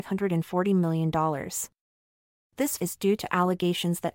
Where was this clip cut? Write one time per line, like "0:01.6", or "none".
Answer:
0:02.8